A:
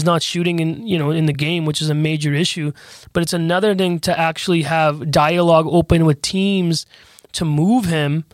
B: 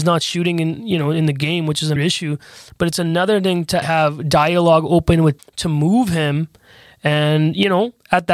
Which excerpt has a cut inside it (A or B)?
B